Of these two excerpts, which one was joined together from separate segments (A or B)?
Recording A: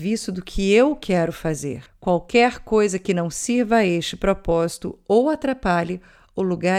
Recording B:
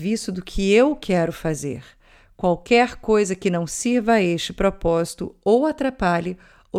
A